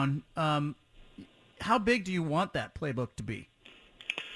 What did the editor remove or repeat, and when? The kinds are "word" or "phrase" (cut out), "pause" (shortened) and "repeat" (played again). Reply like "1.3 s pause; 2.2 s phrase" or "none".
none